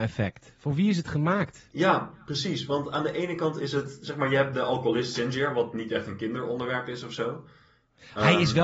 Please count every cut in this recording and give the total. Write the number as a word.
zero